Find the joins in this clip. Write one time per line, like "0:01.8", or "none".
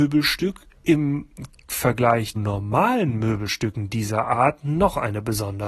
0:02.4